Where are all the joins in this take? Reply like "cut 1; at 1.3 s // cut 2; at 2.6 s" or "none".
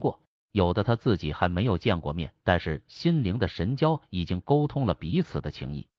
cut 1; at 2.4 s